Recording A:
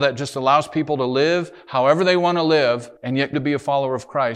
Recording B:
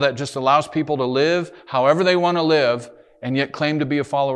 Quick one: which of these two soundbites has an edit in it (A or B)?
A